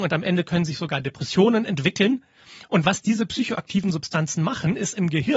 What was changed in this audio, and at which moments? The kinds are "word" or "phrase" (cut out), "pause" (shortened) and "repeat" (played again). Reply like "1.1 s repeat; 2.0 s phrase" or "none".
none